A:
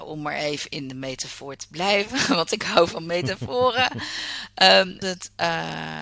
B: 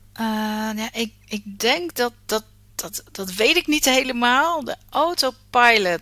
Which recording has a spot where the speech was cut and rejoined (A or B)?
A